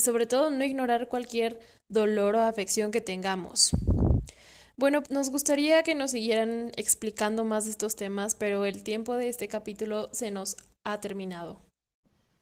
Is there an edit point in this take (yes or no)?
yes